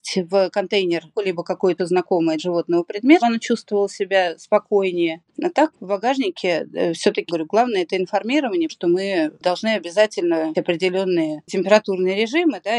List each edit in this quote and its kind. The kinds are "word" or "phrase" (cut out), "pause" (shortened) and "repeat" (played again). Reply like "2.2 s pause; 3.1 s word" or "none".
1.1 s word; 1.8 s word; 2.4 s word; 3.2 s word; 5.7 s word; 7.3 s word; 8.7 s word; 10.5 s word